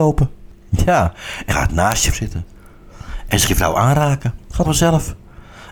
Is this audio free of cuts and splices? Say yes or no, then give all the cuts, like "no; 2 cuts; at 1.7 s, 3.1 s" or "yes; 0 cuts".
no; 4 cuts; at 1.5 s, 2.1 s, 3.5 s, 4.6 s